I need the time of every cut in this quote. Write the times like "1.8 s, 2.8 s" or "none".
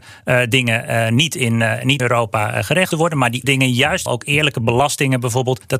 2.0 s, 2.9 s, 3.4 s, 4.1 s